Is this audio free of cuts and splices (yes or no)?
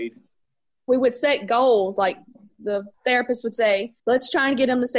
yes